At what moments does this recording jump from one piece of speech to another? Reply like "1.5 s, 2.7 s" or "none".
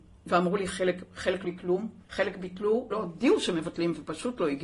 1.4 s, 2.0 s, 2.9 s